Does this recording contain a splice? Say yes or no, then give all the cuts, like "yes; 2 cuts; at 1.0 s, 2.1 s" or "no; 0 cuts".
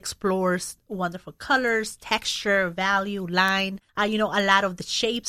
yes; 1 cut; at 3.9 s